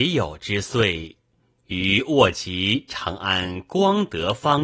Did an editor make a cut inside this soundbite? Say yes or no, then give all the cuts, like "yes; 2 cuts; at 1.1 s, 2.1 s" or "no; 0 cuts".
no; 0 cuts